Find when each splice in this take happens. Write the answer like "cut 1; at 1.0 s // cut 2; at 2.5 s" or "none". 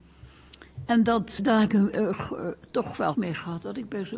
cut 1; at 1.4 s // cut 2; at 1.7 s // cut 3; at 3.1 s